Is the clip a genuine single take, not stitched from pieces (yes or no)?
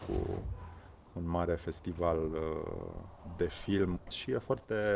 yes